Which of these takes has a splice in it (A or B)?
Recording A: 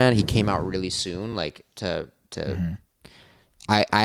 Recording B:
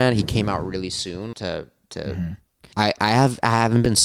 B